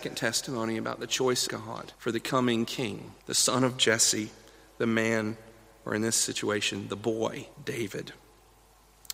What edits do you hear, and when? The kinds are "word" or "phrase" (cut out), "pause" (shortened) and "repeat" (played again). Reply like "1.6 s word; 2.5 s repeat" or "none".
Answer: 1.5 s word; 1.9 s pause; 3.2 s pause; 7.5 s pause